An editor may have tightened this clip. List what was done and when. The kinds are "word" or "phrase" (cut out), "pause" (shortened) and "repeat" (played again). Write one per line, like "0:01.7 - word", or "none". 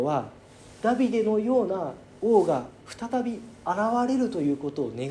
0:02.8 - pause